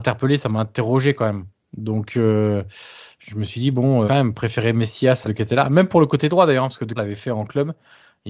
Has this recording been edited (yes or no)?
yes